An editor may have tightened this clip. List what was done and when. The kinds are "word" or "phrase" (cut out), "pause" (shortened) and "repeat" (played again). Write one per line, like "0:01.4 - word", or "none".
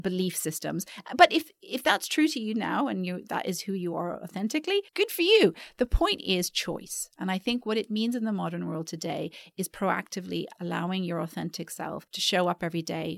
0:04.9 - pause
0:12.1 - pause